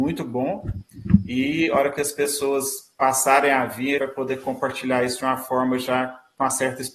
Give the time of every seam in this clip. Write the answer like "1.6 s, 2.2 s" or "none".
4.0 s